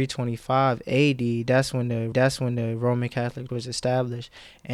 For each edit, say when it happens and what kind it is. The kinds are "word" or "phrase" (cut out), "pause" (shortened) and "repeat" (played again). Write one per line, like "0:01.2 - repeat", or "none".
0:02.1 - repeat
0:03.5 - word

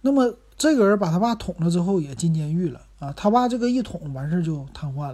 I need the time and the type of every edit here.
0:02.9 - pause

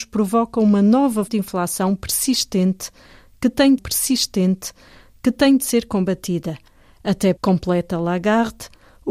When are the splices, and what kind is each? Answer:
0:01.3 - word
0:03.8 - repeat
0:07.4 - word

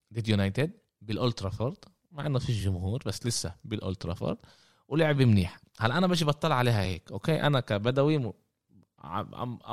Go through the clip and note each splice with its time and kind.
none

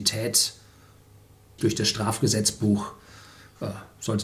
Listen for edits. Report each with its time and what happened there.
0:01.6 - word

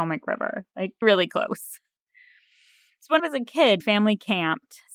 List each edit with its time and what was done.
0:01.0 - word
0:03.2 - word
0:03.8 - word

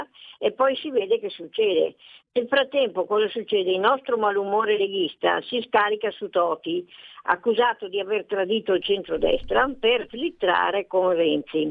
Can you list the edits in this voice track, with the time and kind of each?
none

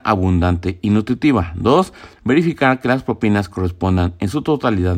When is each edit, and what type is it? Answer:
none

